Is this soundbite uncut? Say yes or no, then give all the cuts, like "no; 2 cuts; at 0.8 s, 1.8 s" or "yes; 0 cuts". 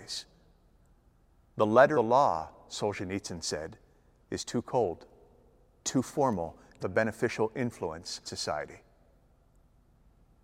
no; 4 cuts; at 1.9 s, 5.8 s, 6.8 s, 8.2 s